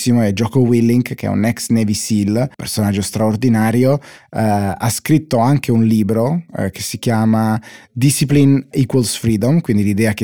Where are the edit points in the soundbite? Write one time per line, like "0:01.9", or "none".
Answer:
0:02.5

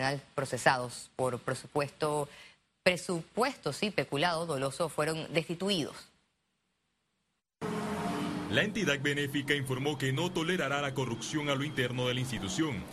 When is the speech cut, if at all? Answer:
none

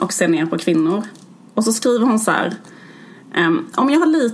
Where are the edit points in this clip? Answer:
none

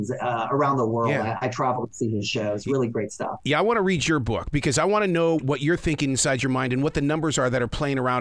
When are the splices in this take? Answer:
0:05.4

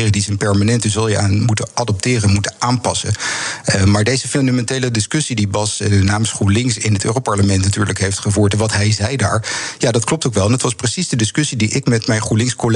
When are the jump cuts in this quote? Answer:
0:06.8

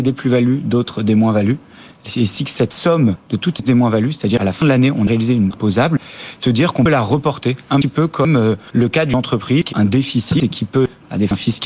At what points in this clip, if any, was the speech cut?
0:03.7
0:04.4
0:05.5
0:09.7

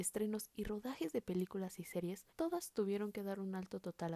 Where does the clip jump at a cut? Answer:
0:02.3

